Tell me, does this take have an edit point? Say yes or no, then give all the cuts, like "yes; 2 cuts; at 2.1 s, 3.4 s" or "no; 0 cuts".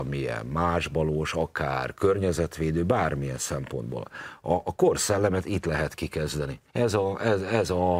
yes; 1 cut; at 6.7 s